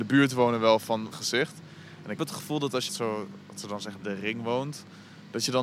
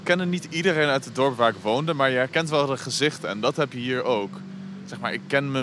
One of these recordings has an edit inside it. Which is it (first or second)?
first